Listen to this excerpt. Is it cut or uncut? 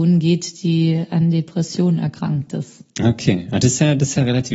uncut